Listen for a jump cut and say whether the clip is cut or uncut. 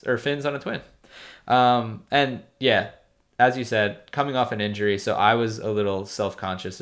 uncut